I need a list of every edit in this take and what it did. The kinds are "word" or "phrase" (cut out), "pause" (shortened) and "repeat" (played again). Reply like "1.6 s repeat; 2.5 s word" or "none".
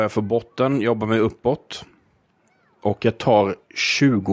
none